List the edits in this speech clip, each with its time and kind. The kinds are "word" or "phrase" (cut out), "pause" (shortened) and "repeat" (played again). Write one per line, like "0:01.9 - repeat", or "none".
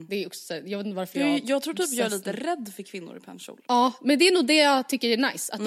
0:03.6 - pause